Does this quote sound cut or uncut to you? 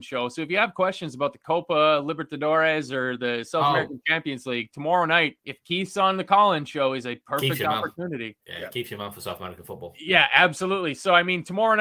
cut